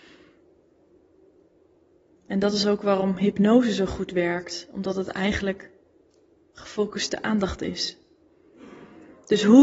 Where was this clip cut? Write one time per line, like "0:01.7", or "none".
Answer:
none